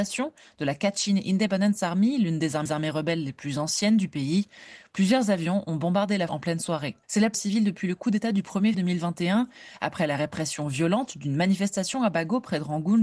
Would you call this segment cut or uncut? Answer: cut